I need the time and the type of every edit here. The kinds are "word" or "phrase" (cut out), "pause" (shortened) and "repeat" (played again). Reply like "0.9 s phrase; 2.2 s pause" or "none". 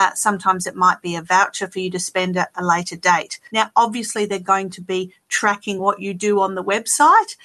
none